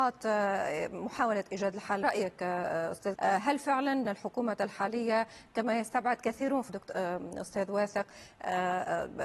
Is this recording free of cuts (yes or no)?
no